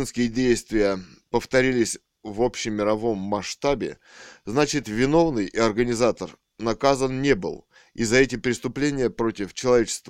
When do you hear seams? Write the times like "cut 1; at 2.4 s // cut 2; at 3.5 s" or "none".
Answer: none